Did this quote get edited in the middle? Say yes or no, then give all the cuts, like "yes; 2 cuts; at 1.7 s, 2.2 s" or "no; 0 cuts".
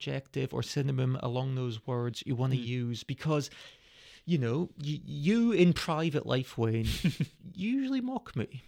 no; 0 cuts